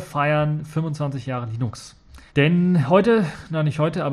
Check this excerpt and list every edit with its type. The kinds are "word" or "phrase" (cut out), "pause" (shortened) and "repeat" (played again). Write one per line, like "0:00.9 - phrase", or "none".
0:02.3 - pause